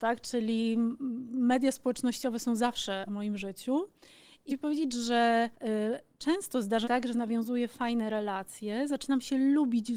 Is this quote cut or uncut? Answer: cut